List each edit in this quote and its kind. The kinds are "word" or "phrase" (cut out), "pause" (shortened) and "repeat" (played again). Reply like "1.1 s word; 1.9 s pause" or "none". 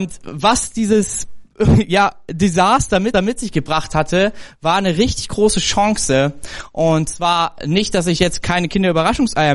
3.1 s repeat